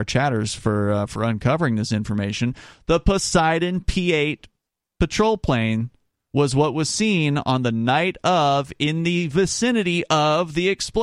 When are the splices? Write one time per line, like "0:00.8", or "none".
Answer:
none